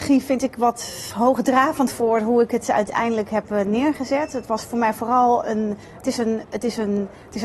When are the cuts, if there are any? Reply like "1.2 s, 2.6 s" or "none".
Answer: none